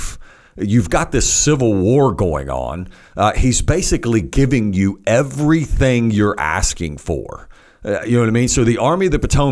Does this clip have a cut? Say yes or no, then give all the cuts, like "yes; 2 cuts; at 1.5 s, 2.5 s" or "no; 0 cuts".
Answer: no; 0 cuts